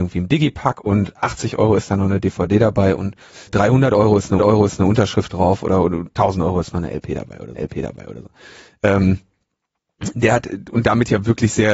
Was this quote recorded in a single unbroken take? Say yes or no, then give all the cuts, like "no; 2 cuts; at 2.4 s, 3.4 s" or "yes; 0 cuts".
no; 3 cuts; at 3.5 s, 4.4 s, 7.6 s